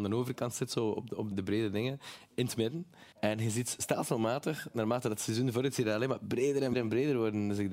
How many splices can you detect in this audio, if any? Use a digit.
3